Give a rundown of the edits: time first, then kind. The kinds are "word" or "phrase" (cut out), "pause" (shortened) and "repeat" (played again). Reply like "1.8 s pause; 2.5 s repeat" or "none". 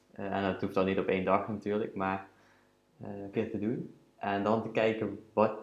3.3 s word